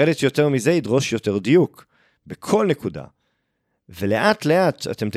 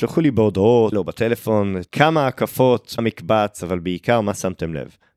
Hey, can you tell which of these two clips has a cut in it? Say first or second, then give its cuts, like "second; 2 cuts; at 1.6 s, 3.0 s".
second; 3 cuts; at 0.9 s, 1.9 s, 3.0 s